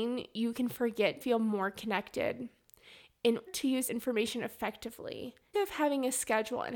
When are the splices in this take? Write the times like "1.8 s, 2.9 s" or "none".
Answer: 1.2 s, 3.5 s, 3.9 s, 5.5 s